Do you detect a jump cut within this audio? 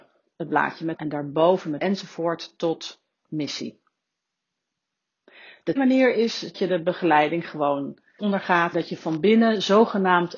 yes; 6 cuts; at 1.0 s, 1.8 s, 5.8 s, 6.5 s, 8.2 s, 8.7 s

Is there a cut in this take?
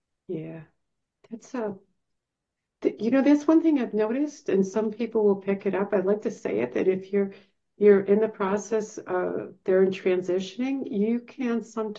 no; 0 cuts

